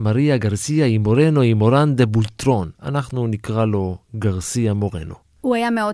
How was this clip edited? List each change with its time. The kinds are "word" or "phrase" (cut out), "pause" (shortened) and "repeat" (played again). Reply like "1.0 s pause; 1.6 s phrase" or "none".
2.7 s pause